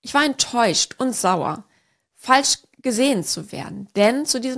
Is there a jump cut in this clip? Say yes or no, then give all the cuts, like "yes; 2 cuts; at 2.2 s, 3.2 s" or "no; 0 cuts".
no; 0 cuts